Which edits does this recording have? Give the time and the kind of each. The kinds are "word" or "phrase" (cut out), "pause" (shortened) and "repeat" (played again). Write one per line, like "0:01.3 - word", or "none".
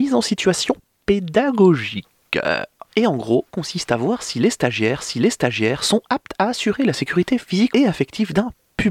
0:03.5 - word
0:05.0 - repeat
0:07.7 - word